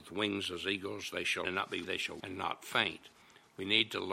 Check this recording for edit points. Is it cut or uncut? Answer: cut